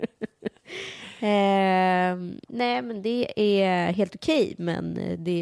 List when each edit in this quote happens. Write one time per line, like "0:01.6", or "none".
0:02.4